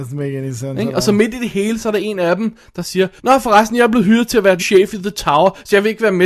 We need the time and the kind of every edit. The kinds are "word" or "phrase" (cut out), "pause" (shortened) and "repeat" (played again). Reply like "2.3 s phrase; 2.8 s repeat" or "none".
3.2 s pause; 4.6 s word